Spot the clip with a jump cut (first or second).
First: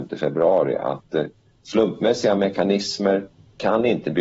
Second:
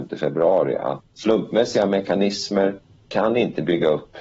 second